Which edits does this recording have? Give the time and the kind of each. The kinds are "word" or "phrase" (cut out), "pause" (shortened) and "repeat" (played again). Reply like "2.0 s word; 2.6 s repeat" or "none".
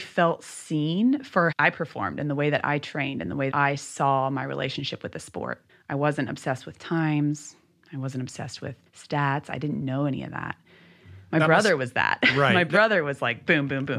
1.5 s word; 3.5 s word; 5.7 s pause; 8.9 s pause

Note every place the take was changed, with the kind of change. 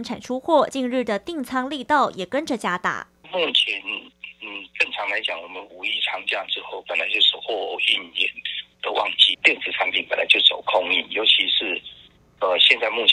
none

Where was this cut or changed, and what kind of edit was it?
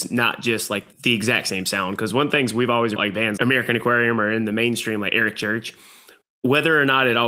0.9 s pause; 3.0 s phrase; 3.4 s word

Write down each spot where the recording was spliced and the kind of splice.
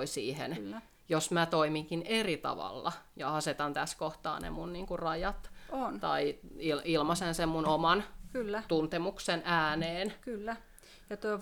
none

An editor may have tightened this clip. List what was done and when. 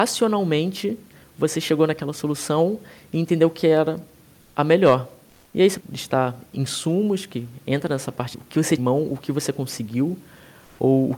5.8 s word; 8.3 s word; 8.8 s word

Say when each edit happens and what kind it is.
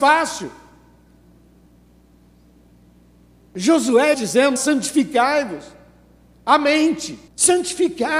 4.1 s word; 4.6 s word; 7.3 s pause

